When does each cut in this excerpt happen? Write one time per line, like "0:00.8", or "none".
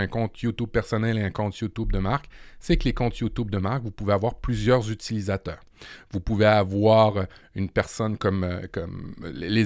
none